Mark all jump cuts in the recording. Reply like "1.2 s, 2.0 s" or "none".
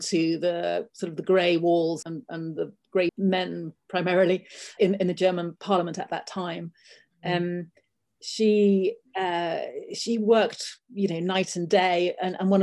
2.0 s, 3.1 s, 4.8 s